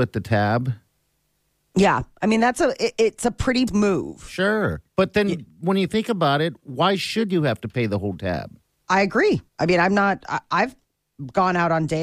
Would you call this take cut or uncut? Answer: cut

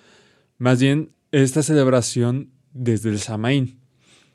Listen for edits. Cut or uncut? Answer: cut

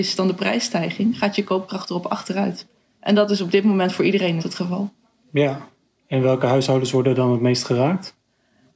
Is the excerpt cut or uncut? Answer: cut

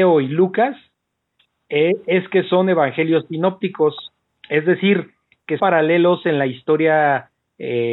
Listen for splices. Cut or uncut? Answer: cut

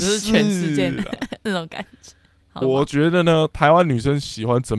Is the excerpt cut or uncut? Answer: cut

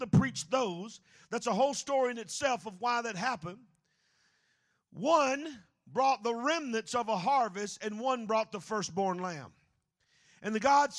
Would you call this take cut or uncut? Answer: uncut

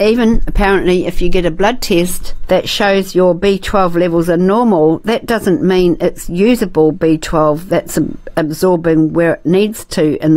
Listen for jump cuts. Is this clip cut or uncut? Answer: uncut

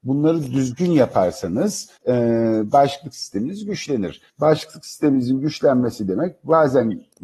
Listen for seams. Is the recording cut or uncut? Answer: cut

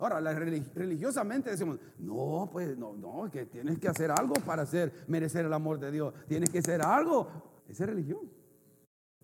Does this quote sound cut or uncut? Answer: cut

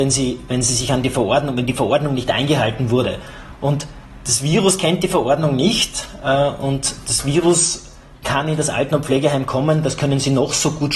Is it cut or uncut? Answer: uncut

